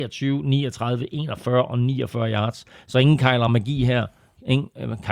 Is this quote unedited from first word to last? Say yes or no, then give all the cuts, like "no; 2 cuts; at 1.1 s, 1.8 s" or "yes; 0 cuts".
yes; 0 cuts